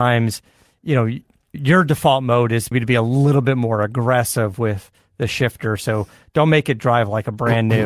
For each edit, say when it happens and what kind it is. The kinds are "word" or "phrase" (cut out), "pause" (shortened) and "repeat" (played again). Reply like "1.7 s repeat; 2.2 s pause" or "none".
1.5 s word; 2.7 s word